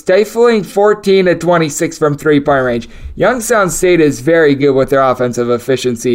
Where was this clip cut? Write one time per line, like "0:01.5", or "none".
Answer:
none